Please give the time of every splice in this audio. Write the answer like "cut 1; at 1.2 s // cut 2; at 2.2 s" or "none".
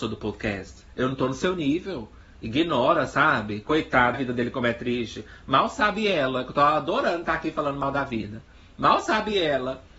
cut 1; at 4.1 s